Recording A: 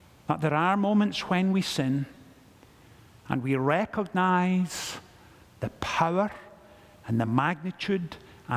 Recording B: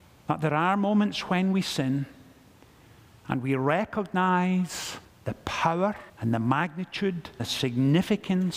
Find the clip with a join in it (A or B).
B